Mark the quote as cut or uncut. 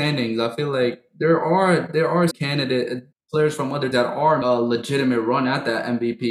cut